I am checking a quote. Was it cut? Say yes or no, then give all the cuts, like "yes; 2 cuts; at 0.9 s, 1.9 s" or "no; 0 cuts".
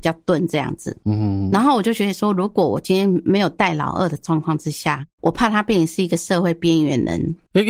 yes; 1 cut; at 5.1 s